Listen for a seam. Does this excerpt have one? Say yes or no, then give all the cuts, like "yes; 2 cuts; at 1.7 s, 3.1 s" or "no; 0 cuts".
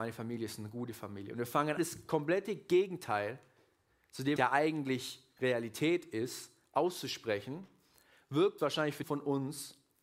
yes; 4 cuts; at 1.8 s, 4.4 s, 8.6 s, 9.0 s